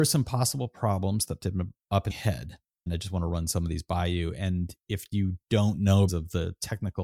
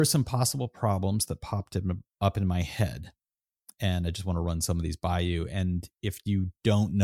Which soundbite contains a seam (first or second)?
first